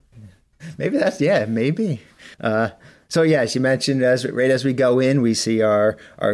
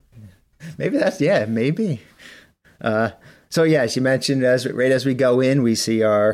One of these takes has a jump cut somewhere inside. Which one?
first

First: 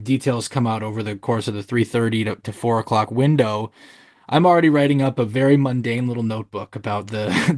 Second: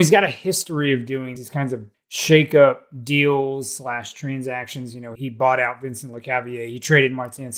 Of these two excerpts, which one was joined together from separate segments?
second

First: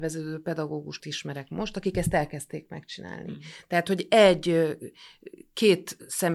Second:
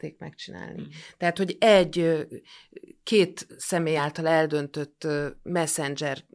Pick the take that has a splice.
first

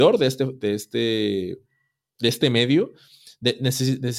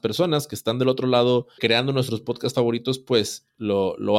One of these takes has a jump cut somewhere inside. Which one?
second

